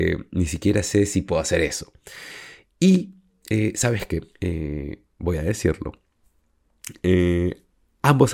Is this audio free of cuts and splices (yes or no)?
no